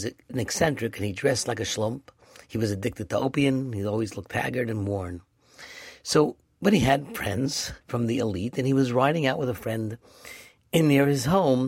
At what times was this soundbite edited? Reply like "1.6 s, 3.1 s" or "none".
7.8 s